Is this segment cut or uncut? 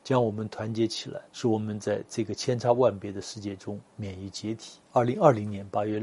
cut